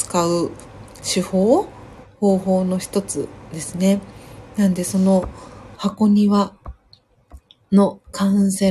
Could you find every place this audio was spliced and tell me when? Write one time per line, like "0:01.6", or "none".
none